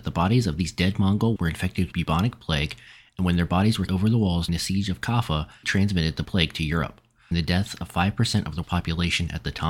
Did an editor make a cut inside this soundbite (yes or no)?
yes